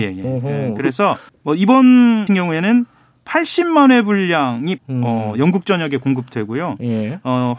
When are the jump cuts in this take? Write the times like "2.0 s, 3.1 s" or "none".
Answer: 1.3 s, 2.3 s, 4.8 s